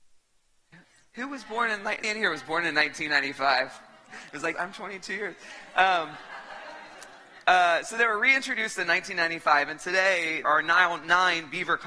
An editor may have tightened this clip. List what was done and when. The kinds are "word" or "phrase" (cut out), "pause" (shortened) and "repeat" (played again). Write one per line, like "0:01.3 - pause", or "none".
0:02.0 - word
0:04.5 - word
0:07.4 - pause
0:10.4 - word